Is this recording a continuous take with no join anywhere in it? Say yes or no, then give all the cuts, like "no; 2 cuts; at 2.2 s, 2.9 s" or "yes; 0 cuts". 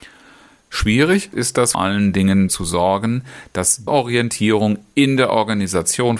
no; 4 cuts; at 1.3 s, 1.7 s, 2.5 s, 3.9 s